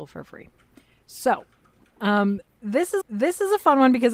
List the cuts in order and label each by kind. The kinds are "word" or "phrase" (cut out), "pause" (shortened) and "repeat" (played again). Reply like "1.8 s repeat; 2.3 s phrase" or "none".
3.0 s repeat